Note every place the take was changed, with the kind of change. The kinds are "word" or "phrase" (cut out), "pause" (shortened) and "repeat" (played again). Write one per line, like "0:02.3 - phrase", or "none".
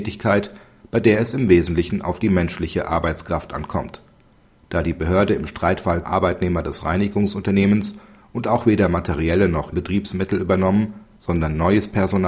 0:06.0 - word
0:09.7 - word